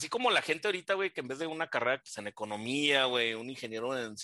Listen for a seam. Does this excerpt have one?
yes; 2 cuts; at 1.4 s, 2.0 s

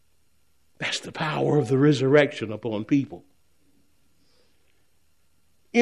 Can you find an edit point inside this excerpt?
no; 0 cuts

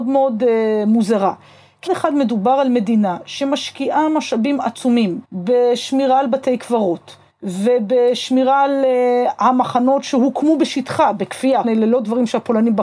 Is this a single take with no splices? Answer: no; 4 cuts; at 1.9 s, 5.2 s, 7.3 s, 11.6 s

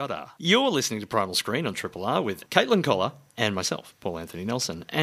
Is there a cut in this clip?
yes; 1 cut; at 2.5 s

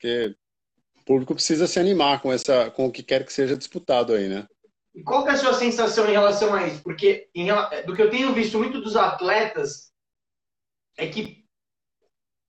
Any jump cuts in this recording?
no; 0 cuts

